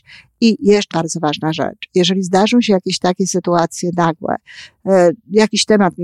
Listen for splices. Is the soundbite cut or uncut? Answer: cut